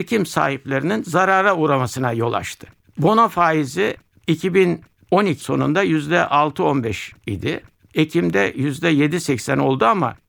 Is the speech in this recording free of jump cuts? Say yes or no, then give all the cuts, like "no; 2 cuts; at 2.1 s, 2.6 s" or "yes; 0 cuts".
no; 2 cuts; at 5.4 s, 7.2 s